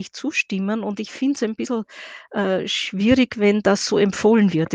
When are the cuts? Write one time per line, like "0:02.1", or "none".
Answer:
none

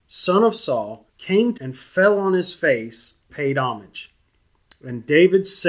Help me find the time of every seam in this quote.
0:01.1
0:01.6
0:03.3

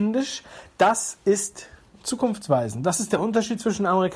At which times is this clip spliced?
none

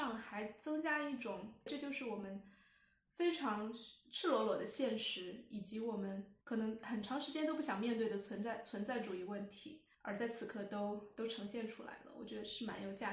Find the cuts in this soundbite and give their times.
0:01.7
0:06.4
0:09.9

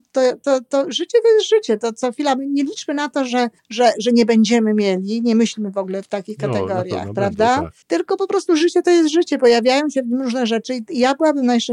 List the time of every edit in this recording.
0:03.6
0:07.8

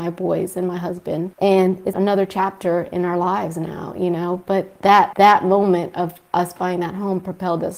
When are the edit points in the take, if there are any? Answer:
0:01.9

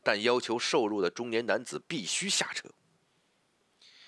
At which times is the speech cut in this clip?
none

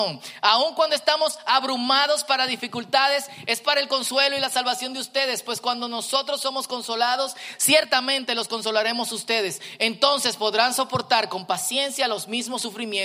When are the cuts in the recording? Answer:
none

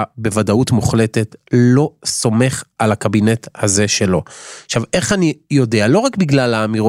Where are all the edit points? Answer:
none

